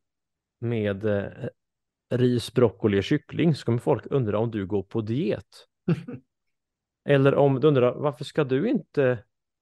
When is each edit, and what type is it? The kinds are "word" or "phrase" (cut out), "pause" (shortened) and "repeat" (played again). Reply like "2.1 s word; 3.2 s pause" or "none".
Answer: none